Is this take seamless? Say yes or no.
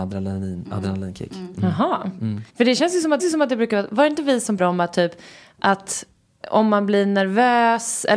no